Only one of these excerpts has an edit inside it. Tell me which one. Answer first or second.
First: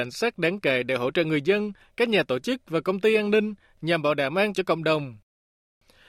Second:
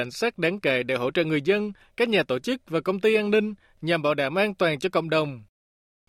first